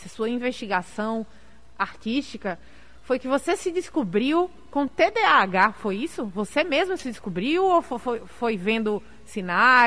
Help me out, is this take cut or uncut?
uncut